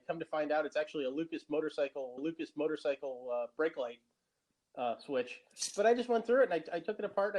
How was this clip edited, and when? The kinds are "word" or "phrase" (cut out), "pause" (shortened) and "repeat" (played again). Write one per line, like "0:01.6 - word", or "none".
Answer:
0:02.2 - repeat